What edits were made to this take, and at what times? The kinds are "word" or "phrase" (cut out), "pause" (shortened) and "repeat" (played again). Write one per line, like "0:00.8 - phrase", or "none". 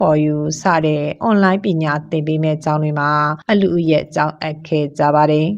0:03.4 - pause

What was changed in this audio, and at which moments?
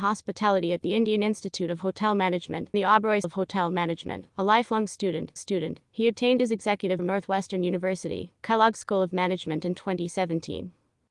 0:02.7 - word
0:03.2 - word
0:04.3 - pause
0:05.4 - repeat
0:07.0 - phrase

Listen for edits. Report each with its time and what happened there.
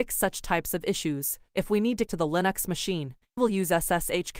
0:02.1 - word
0:03.4 - word

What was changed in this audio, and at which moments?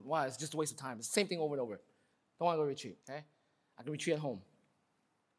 0:03.0 - pause

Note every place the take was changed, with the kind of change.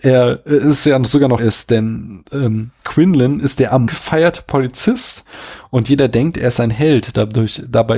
0:01.4 - word
0:02.8 - pause
0:03.9 - word

